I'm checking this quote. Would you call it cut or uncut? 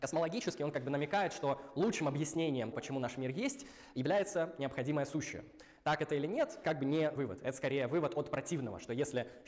cut